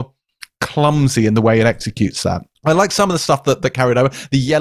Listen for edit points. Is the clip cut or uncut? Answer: uncut